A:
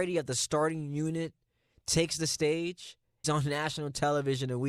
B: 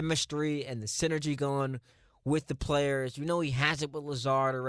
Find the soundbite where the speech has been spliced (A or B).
A